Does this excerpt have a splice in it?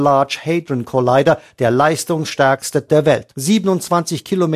yes; 2 cuts; at 2.9 s, 3.3 s

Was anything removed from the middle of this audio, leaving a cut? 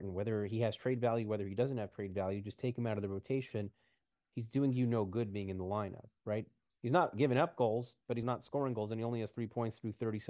yes; 1 cut; at 8.2 s

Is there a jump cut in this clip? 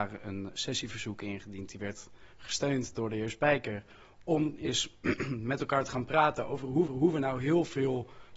yes; 1 cut; at 6.9 s

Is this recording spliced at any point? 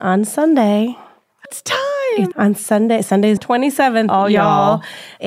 yes; 3 cuts; at 1.5 s, 2.3 s, 3.4 s

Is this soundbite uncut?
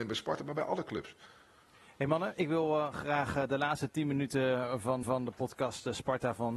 no; 1 cut; at 5.0 s

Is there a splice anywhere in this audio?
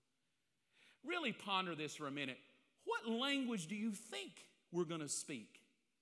no; 0 cuts

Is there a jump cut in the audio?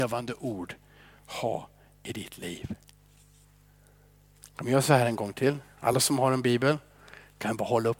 no; 0 cuts

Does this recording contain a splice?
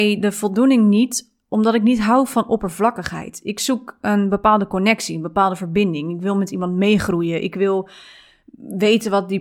no; 0 cuts

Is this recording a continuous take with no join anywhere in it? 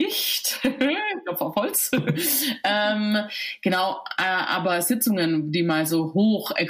yes; 0 cuts

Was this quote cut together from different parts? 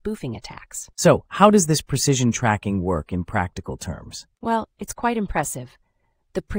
yes; 2 cuts; at 0.9 s, 4.3 s

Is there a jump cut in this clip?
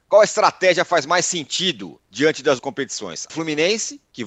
yes; 3 cuts; at 2.0 s, 2.6 s, 3.3 s

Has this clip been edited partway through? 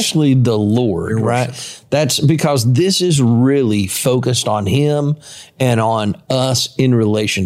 no; 0 cuts

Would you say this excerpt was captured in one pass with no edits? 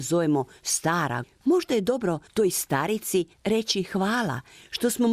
no; 3 cuts; at 1.2 s, 2.3 s, 3.3 s

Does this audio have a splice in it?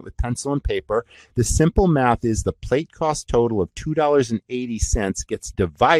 no; 0 cuts

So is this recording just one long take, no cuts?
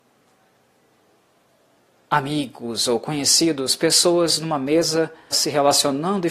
no; 1 cut; at 5.3 s

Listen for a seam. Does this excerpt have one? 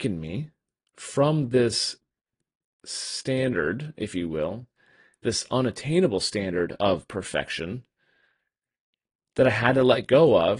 no; 0 cuts

